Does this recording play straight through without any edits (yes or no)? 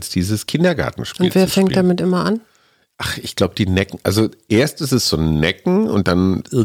yes